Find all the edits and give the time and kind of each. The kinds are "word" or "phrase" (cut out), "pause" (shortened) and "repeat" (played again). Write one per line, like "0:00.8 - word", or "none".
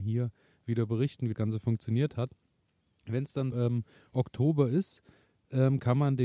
0:01.3 - word
0:03.5 - word